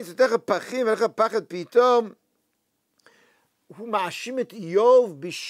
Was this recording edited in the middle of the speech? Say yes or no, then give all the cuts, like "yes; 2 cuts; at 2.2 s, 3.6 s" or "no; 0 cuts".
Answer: no; 0 cuts